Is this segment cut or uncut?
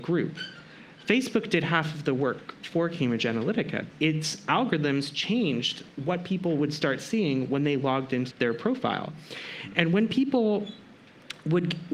cut